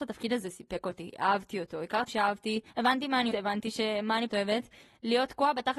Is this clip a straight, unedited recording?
no; 4 cuts; at 2.1 s, 2.7 s, 3.3 s, 4.3 s

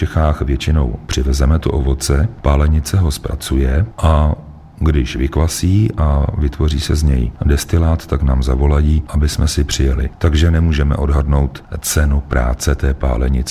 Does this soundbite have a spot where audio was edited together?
no; 0 cuts

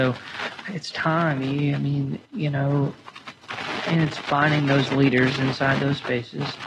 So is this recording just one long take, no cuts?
no; 1 cut; at 2.2 s

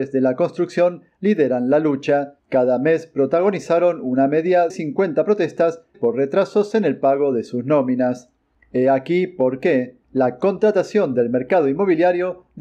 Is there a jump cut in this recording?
yes; 4 cuts; at 2.4 s, 4.7 s, 5.9 s, 10.0 s

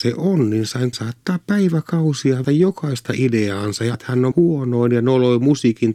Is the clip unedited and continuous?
no; 4 cuts; at 0.9 s, 2.4 s, 3.9 s, 4.3 s

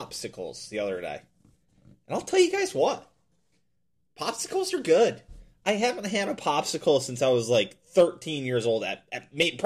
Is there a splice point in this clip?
no; 0 cuts

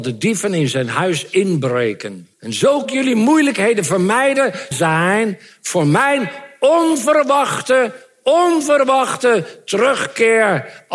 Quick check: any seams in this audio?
yes; 3 cuts; at 2.3 s, 2.8 s, 4.7 s

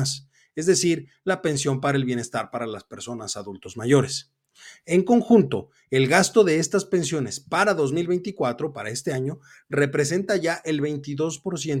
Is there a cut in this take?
no; 0 cuts

